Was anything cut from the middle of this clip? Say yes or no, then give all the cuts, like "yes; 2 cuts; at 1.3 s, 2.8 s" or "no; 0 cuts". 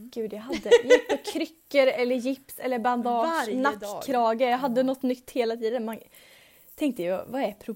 no; 0 cuts